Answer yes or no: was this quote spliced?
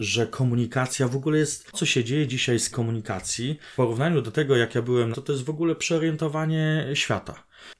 yes